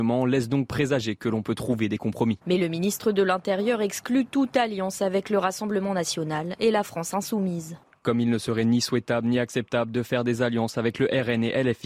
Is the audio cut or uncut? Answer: cut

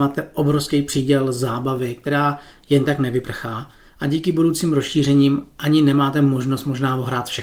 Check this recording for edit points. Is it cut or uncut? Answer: uncut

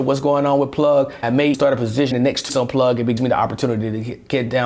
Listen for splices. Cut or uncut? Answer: cut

